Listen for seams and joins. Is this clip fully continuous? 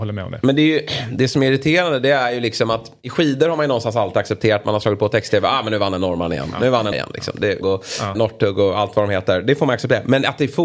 no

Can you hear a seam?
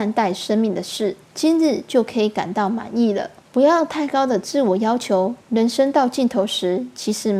yes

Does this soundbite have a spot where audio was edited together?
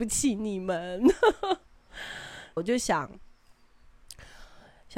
yes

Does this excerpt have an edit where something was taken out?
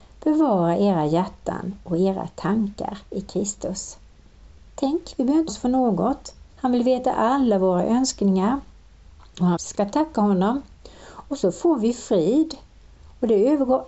yes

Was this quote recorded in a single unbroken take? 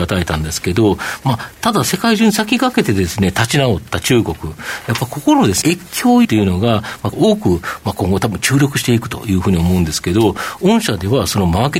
no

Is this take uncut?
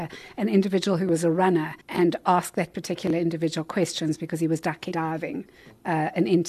no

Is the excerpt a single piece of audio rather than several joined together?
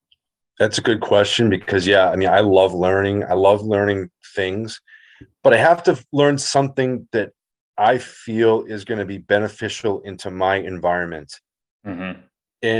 yes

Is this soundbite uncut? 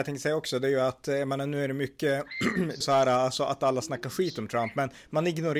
no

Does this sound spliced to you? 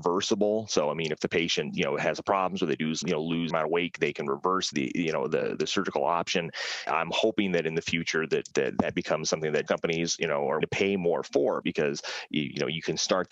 yes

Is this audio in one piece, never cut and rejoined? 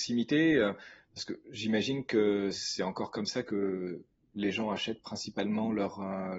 yes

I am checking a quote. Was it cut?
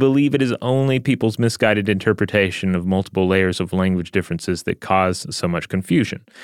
no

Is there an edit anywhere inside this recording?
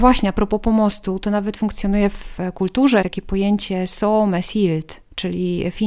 yes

